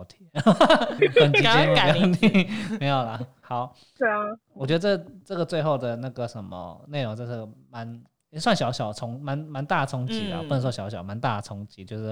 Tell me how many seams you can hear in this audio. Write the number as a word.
three